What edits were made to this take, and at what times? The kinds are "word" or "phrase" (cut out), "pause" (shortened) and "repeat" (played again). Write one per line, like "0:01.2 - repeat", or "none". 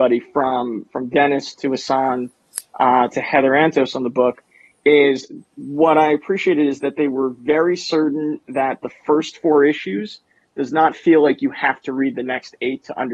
none